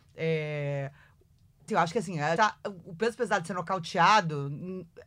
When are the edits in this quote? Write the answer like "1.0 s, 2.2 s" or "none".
1.7 s, 2.4 s